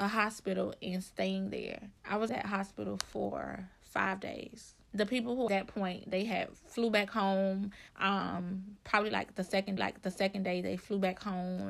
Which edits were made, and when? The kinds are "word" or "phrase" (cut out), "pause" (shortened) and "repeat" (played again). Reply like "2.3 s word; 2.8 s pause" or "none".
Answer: 2.0 s pause; 2.3 s word; 4.8 s pause; 5.5 s phrase; 7.9 s pause; 9.8 s repeat